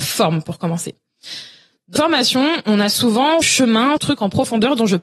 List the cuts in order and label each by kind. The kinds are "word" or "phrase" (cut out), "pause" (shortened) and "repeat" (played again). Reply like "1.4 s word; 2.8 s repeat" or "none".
2.0 s word; 3.4 s word; 4.0 s word